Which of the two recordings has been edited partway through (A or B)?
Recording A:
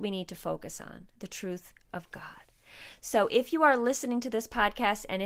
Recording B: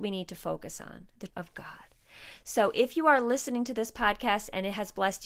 B